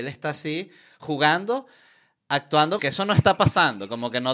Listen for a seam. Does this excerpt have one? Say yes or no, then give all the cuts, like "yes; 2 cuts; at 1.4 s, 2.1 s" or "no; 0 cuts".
yes; 1 cut; at 2.8 s